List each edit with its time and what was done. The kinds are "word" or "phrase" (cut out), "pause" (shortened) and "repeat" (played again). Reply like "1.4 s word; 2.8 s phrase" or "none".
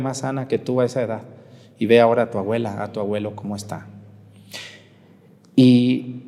none